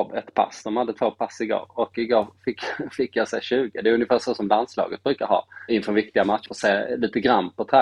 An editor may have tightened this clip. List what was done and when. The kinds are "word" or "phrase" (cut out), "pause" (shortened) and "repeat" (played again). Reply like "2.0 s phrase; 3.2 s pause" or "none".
5.7 s word

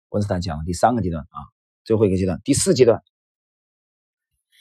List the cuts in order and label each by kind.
none

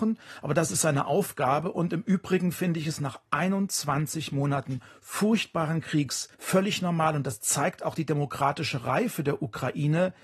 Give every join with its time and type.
6.3 s pause

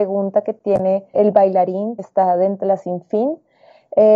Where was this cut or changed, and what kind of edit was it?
1.1 s word; 2.0 s word; 2.6 s word

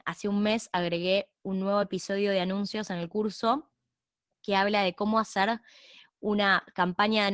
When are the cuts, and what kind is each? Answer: none

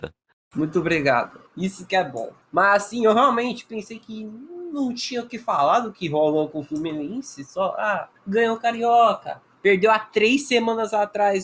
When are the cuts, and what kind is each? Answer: 1.5 s pause; 2.4 s pause; 8.2 s pause

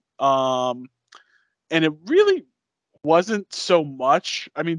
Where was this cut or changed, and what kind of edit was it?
none

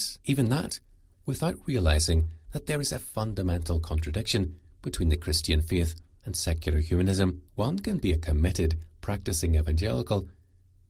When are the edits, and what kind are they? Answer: 7.5 s pause

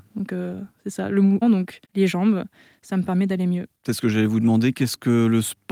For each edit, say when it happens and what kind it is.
1.4 s phrase; 1.8 s pause

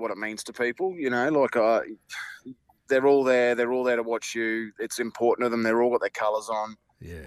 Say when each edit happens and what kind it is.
none

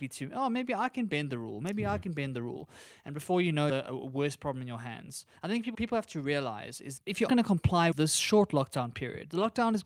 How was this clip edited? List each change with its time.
3.7 s phrase; 5.4 s pause; 5.7 s word; 7.0 s word; 7.3 s word; 7.9 s phrase

